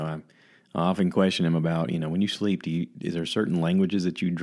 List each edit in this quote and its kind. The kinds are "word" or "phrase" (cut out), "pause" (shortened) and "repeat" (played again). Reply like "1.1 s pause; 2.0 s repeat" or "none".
none